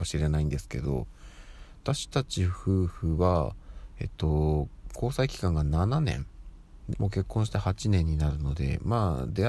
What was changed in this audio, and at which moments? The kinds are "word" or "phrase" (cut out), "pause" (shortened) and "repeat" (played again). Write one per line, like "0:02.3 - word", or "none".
0:06.9 - word